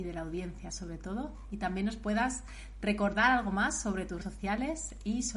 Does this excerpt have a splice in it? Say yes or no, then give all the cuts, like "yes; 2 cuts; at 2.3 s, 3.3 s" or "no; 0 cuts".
yes; 1 cut; at 4.2 s